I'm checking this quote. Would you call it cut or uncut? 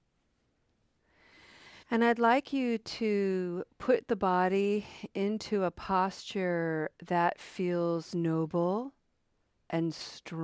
cut